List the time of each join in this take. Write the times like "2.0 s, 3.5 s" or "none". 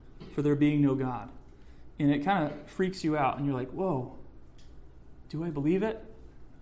none